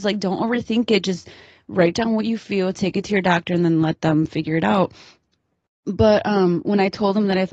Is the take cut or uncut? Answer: uncut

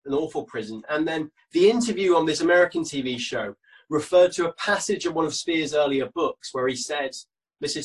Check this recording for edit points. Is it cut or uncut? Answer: uncut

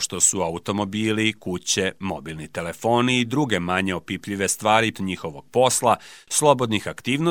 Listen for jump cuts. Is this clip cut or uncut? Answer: cut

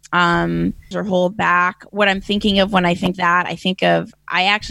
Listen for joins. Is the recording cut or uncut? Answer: cut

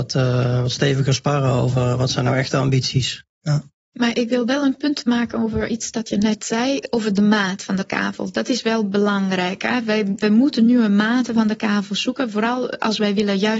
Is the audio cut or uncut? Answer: uncut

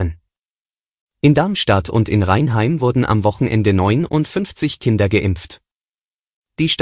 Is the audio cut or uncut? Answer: uncut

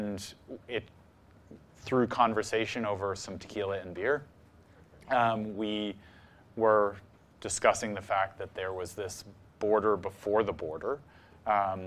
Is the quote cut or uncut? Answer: cut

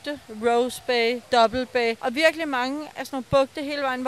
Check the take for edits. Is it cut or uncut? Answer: uncut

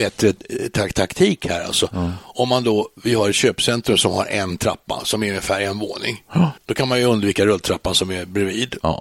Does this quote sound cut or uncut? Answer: cut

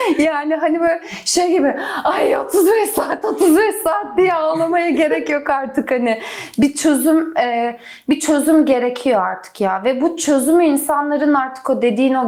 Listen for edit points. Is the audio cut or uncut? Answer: uncut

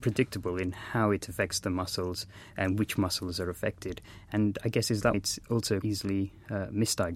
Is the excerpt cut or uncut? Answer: cut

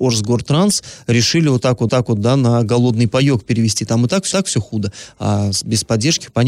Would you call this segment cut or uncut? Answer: cut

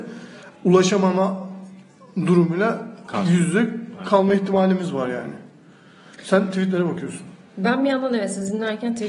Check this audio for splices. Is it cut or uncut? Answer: uncut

